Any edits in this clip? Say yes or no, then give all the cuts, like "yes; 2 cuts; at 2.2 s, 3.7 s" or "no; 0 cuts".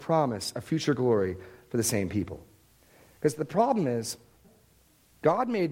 no; 0 cuts